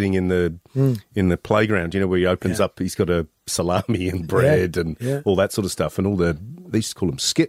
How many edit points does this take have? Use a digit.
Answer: 0